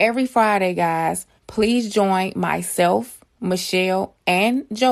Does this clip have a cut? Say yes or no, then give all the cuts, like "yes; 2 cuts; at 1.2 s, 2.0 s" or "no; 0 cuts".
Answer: yes; 1 cut; at 1.4 s